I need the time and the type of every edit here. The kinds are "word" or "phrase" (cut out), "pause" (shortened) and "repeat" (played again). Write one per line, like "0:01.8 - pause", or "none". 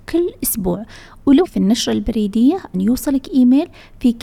0:01.4 - word
0:02.7 - word

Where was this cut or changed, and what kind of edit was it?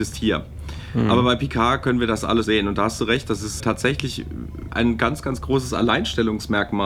0:02.4 - word
0:03.6 - word
0:04.7 - word

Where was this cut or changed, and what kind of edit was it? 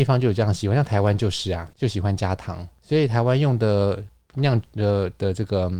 0:01.7 - pause

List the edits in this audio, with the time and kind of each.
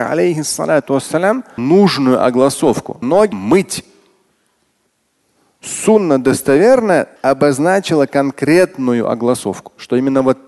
0:01.6 - word
0:03.0 - word
0:03.3 - word
0:07.2 - pause

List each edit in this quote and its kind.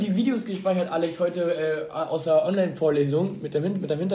none

